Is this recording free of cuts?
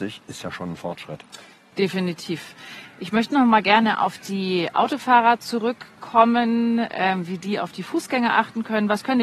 yes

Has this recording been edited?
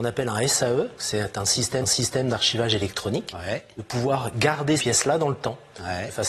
yes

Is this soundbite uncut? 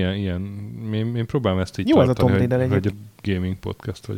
no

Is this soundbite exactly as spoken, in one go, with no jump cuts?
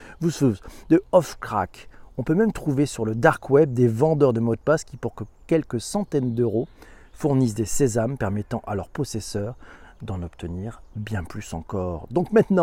yes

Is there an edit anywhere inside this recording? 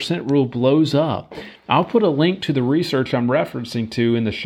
no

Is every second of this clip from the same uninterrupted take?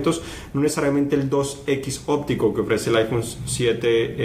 yes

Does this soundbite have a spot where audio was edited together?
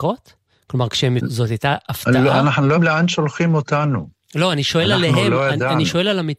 yes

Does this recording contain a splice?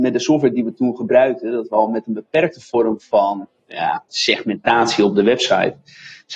no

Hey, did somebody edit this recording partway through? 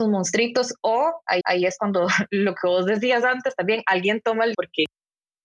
yes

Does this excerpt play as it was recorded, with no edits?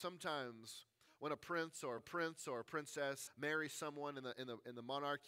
no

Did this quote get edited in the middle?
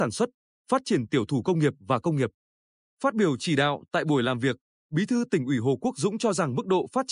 no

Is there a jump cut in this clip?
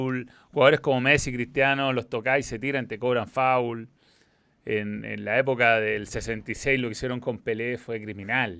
no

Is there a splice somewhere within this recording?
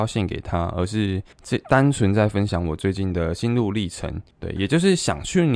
yes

